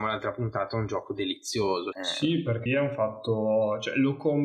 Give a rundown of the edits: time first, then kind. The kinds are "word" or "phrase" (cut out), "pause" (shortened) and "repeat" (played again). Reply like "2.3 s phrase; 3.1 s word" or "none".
1.9 s word; 2.7 s word